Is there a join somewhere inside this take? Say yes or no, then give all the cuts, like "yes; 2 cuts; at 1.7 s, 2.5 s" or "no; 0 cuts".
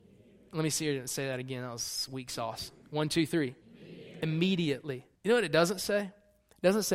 yes; 2 cuts; at 3.6 s, 5.2 s